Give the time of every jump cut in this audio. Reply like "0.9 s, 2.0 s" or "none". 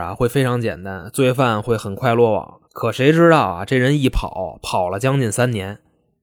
2.7 s